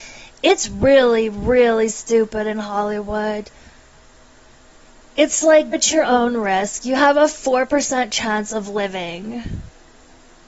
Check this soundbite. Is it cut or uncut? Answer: cut